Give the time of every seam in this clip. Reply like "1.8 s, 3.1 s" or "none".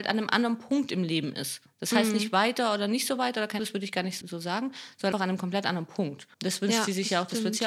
3.6 s, 4.2 s, 5.1 s, 6.3 s